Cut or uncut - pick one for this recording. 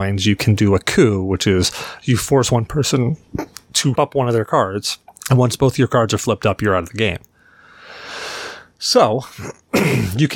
cut